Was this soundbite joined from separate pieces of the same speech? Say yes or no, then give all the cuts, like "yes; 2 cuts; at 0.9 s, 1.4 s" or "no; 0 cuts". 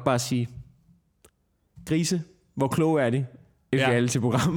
no; 0 cuts